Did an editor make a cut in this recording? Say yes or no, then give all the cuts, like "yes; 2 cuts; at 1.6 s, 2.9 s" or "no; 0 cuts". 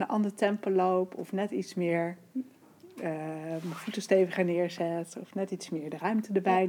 no; 0 cuts